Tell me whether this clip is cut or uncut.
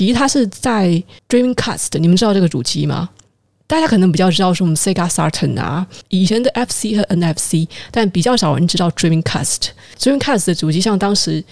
uncut